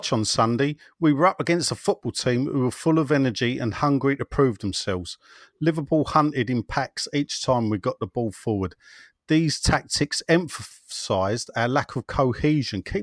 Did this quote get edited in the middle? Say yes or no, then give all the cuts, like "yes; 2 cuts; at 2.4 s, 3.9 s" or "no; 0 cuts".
no; 0 cuts